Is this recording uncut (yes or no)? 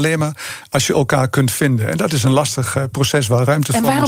yes